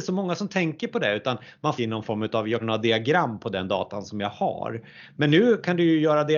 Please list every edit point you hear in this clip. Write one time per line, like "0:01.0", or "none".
0:01.8
0:02.6